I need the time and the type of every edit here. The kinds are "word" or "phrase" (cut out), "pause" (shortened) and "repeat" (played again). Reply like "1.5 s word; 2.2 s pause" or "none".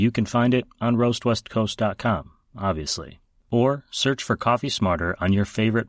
none